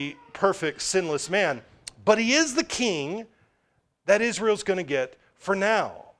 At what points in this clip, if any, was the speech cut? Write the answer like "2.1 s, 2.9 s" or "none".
none